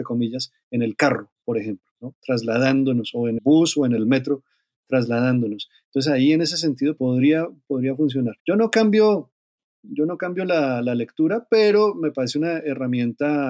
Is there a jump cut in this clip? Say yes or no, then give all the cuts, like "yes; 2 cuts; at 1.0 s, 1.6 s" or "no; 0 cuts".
yes; 3 cuts; at 3.4 s, 7.0 s, 8.4 s